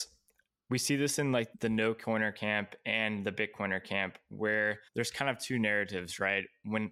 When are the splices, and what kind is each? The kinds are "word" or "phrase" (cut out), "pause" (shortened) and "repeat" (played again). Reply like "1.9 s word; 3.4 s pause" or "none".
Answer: 1.5 s word; 4.9 s pause